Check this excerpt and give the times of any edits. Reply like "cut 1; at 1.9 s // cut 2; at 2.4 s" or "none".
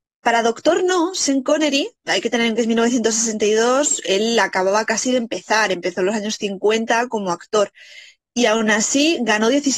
cut 1; at 2.1 s // cut 2; at 2.6 s